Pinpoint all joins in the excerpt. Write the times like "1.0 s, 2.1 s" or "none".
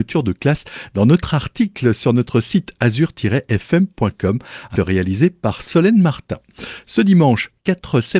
4.8 s